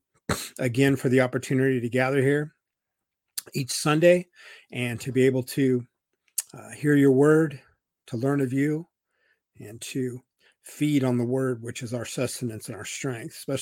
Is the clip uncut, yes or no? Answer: yes